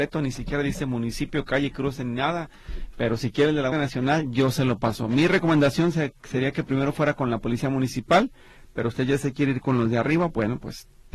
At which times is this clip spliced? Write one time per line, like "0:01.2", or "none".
0:03.7